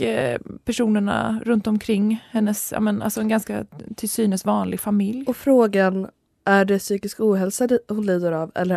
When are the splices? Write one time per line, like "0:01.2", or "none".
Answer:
none